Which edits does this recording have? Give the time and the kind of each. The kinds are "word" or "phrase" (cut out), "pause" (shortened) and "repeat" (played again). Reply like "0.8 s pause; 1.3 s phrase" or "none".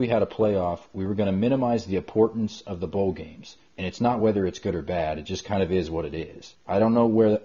none